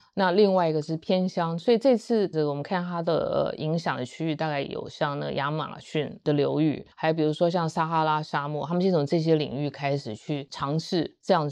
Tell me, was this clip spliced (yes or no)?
yes